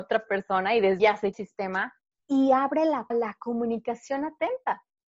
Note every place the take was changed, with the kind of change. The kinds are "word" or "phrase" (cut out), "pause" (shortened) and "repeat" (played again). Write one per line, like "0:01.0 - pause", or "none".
0:01.0 - word
0:01.3 - phrase
0:02.2 - pause
0:03.1 - word